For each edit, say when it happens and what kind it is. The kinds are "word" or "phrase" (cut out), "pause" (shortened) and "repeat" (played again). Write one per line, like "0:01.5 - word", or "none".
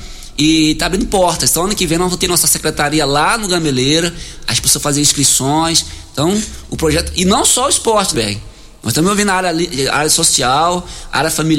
0:08.1 - word